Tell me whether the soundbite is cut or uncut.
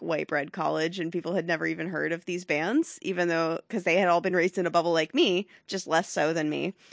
uncut